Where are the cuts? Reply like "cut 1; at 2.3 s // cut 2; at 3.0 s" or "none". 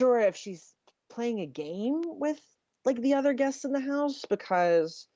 none